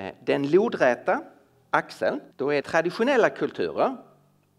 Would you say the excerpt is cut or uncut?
cut